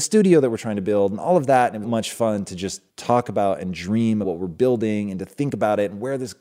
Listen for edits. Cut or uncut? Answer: cut